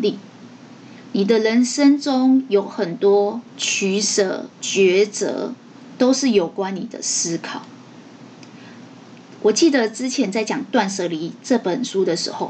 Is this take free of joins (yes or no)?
no